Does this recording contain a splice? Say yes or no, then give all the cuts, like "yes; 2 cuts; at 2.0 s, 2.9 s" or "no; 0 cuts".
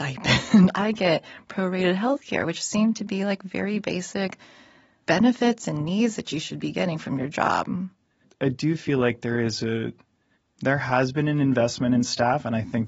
no; 0 cuts